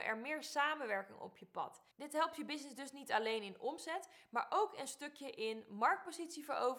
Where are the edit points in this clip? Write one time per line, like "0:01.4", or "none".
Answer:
0:01.9